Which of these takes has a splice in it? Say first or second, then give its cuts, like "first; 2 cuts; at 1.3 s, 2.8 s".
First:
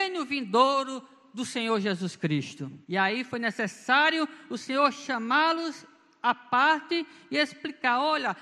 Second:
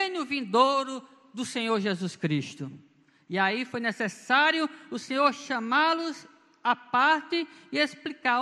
first; 1 cut; at 2.8 s